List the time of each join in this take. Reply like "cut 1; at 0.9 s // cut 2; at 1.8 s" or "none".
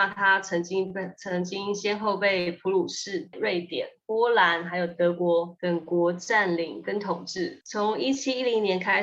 cut 1; at 3.3 s